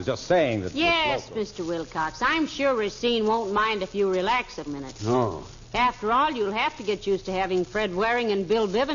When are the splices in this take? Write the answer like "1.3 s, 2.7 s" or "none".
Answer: 4.7 s